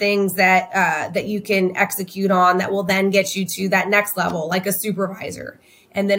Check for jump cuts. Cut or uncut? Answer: uncut